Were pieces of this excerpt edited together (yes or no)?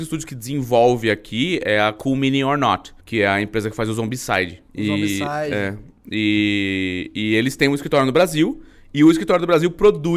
yes